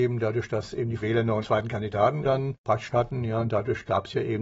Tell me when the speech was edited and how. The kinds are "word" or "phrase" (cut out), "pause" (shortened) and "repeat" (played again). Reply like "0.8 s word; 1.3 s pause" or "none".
1.0 s word; 1.4 s word; 2.2 s word; 2.9 s word